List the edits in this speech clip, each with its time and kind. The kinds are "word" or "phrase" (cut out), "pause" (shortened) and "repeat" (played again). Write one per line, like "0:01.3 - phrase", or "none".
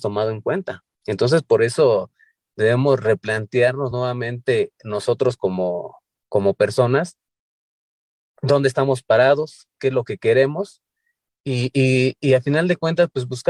none